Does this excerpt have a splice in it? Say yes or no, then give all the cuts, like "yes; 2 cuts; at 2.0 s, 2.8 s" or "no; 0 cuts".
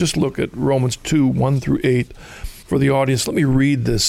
yes; 1 cut; at 2.6 s